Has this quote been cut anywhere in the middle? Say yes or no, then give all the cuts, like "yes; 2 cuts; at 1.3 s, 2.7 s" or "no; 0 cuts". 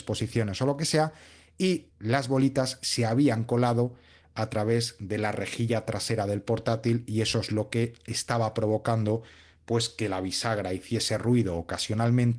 no; 0 cuts